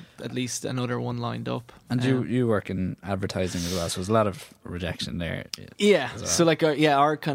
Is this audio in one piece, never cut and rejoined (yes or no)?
yes